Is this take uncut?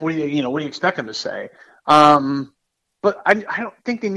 yes; 0 cuts

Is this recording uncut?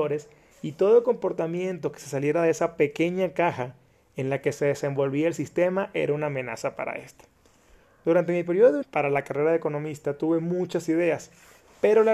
no; 1 cut; at 8.8 s

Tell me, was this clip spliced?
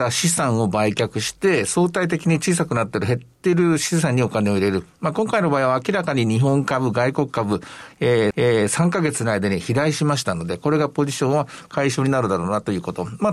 yes; 1 cut; at 8.3 s

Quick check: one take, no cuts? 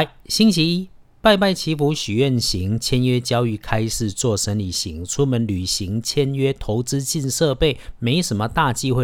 yes; 0 cuts

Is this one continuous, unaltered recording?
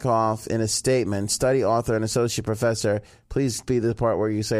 yes; 0 cuts

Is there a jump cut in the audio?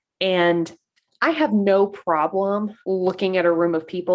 yes; 1 cut; at 2.8 s

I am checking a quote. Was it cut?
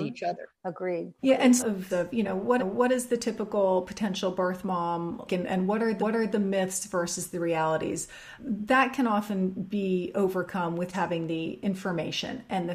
yes; 8 cuts; at 1.2 s, 1.6 s, 1.9 s, 2.6 s, 5.3 s, 6.0 s, 8.4 s, 10.9 s

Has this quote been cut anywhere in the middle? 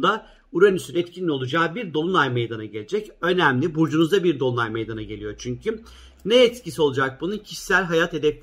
no; 0 cuts

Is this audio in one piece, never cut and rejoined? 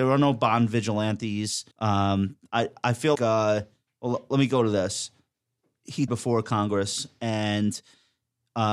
no; 3 cuts; at 1.7 s, 3.1 s, 6.1 s

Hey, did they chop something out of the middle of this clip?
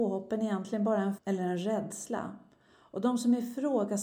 yes; 1 cut; at 1.2 s

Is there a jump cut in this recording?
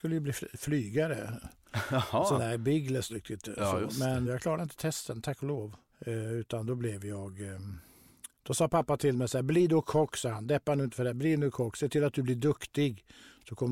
yes; 4 cuts; at 3.1 s, 4.2 s, 5.9 s, 8.3 s

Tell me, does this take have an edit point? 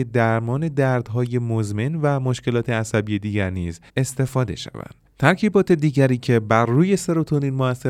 yes; 1 cut; at 3.9 s

